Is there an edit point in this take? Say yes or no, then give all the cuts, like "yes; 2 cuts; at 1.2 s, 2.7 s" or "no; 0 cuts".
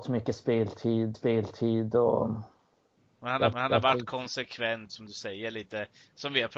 yes; 3 cuts; at 1.1 s, 3.5 s, 4.9 s